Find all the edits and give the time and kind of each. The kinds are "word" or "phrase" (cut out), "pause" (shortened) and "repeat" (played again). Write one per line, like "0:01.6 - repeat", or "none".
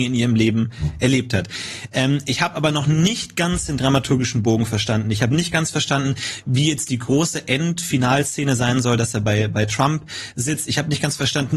none